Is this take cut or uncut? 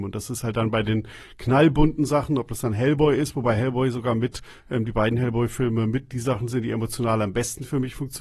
uncut